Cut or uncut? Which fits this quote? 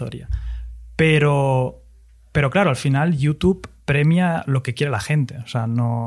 uncut